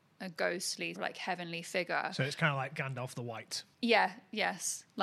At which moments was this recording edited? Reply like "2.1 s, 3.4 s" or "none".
0.9 s, 3.7 s